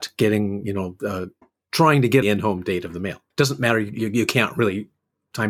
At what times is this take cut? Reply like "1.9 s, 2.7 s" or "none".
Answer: 1.4 s, 2.2 s, 3.3 s